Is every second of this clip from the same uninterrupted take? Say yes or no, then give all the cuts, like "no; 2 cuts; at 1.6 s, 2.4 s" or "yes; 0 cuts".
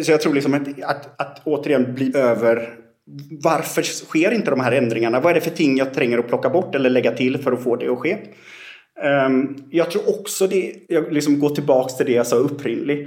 no; 3 cuts; at 1.1 s, 2.1 s, 10.8 s